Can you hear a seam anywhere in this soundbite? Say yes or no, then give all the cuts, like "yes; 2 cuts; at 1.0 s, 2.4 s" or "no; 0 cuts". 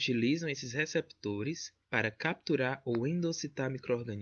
yes; 1 cut; at 1.8 s